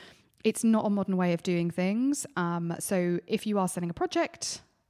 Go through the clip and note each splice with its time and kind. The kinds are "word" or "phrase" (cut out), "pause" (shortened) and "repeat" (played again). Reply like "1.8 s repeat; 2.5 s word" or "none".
none